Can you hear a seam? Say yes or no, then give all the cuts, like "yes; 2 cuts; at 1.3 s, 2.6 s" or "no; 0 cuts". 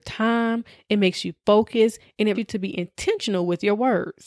yes; 1 cut; at 2.3 s